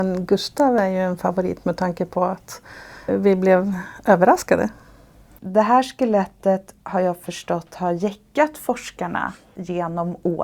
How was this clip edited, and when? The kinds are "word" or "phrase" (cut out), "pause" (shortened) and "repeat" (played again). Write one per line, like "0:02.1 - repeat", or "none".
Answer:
0:03.1 - word
0:06.8 - pause